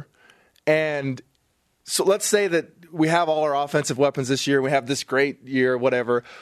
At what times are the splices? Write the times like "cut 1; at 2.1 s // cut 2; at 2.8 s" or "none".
none